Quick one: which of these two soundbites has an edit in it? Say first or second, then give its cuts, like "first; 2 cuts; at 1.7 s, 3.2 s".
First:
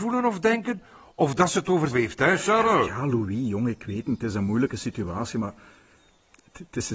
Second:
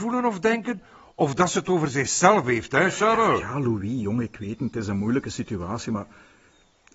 first; 1 cut; at 1.9 s